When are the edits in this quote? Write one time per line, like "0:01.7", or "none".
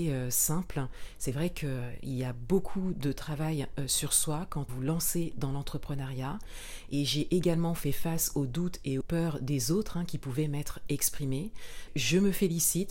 0:04.7
0:09.0
0:11.9